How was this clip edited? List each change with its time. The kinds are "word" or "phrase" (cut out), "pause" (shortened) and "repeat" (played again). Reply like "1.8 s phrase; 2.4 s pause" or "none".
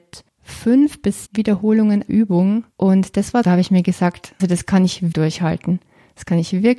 1.3 s word; 2.1 s word; 2.7 s pause; 3.4 s phrase; 4.4 s word; 5.1 s word